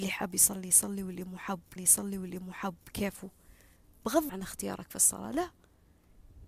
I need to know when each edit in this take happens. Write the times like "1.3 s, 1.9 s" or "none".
1.8 s, 4.3 s